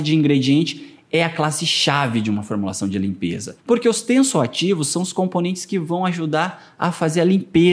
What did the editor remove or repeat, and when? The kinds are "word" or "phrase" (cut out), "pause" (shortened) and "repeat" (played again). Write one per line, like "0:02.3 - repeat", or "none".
0:03.6 - pause